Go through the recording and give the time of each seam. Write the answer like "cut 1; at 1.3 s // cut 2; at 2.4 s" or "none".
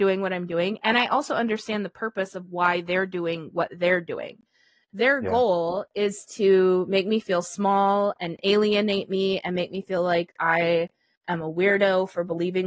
none